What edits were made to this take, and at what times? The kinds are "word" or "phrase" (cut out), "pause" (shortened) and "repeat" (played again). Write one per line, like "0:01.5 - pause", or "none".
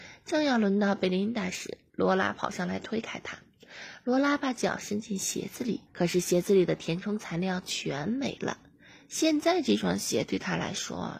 0:05.9 - pause